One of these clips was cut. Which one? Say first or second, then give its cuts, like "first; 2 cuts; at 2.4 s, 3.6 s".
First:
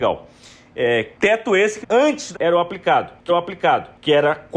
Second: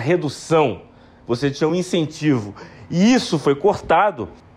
first; 4 cuts; at 1.1 s, 1.8 s, 2.3 s, 3.3 s